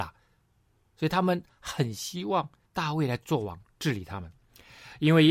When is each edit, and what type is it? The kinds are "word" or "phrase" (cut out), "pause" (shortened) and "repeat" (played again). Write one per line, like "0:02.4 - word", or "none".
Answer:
0:02.6 - pause